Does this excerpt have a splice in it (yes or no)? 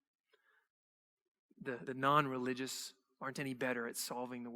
yes